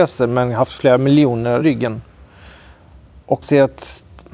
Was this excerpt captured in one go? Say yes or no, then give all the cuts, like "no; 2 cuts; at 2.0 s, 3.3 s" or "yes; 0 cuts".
no; 2 cuts; at 1.6 s, 3.4 s